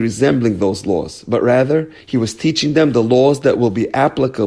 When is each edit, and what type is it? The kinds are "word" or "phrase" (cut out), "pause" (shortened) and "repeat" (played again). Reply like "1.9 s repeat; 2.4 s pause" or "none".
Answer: 2.0 s pause